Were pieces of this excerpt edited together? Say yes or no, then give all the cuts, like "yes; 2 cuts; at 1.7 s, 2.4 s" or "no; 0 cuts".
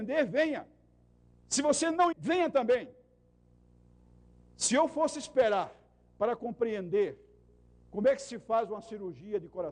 yes; 1 cut; at 2.1 s